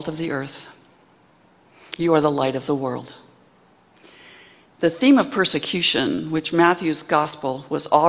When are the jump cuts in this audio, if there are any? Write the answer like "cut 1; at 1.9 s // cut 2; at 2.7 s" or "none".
none